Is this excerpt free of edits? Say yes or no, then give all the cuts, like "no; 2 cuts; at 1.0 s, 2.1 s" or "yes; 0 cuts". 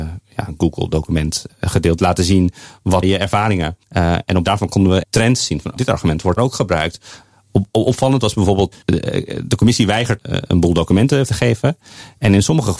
no; 9 cuts; at 2.0 s, 3.0 s, 4.4 s, 5.0 s, 5.8 s, 6.4 s, 8.7 s, 10.2 s, 11.3 s